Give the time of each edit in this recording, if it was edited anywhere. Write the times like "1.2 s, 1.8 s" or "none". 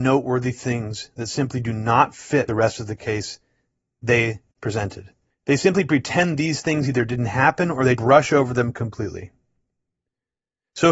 2.5 s, 5.3 s, 8.0 s